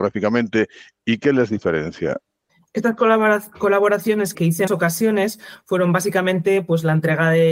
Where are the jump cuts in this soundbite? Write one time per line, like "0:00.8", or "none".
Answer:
0:02.5
0:04.3
0:04.7